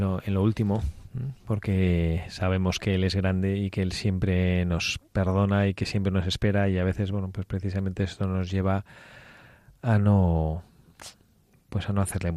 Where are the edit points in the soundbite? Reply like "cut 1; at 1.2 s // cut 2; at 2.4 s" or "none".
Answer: none